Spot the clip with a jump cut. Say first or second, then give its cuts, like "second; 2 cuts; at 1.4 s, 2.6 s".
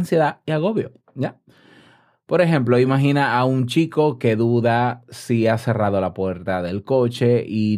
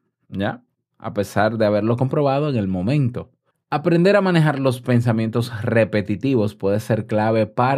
second; 1 cut; at 3.5 s